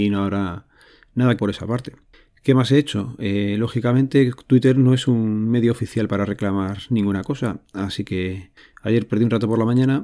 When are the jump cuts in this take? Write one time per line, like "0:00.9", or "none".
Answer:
0:01.4